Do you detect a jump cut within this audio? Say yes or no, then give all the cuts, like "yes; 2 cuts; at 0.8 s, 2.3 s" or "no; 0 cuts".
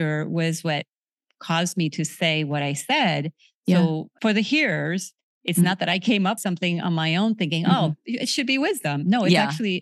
yes; 2 cuts; at 4.2 s, 6.4 s